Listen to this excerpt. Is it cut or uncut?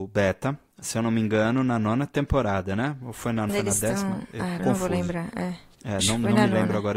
cut